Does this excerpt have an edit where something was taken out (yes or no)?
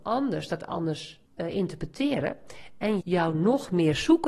yes